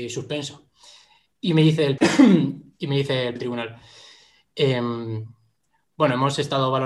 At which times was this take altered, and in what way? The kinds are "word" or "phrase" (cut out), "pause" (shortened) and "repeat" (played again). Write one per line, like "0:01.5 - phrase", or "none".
0:02.0 - word
0:03.4 - word